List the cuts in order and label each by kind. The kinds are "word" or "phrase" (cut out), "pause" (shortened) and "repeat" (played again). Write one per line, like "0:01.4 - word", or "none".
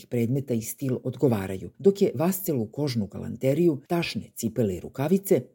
0:01.7 - pause
0:03.9 - pause